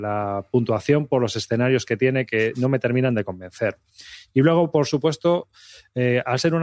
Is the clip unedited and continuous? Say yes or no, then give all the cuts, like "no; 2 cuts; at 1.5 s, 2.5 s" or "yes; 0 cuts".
yes; 0 cuts